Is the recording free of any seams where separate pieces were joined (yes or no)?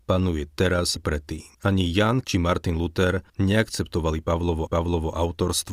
no